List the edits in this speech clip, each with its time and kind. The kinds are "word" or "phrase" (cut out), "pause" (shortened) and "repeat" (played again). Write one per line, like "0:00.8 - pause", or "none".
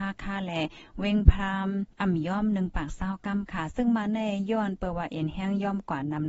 0:01.9 - pause